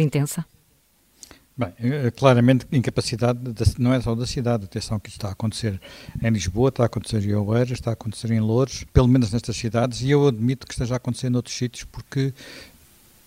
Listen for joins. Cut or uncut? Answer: cut